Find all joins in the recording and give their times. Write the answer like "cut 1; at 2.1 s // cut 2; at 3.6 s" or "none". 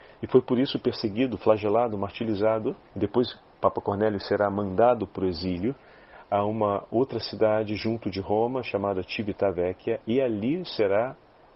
cut 1; at 2.9 s